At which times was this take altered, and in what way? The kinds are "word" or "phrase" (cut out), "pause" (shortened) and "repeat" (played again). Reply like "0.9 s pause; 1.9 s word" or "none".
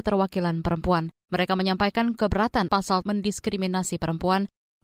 1.2 s pause; 2.7 s word; 3.0 s phrase